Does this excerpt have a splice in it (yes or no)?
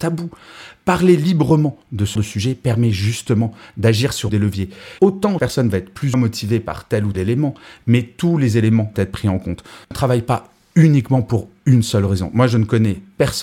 yes